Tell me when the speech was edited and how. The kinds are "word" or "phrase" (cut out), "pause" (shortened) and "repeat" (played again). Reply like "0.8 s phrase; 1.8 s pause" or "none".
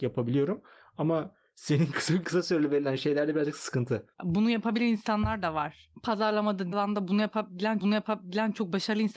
2.2 s word; 4.1 s pause; 6.7 s word; 7.8 s repeat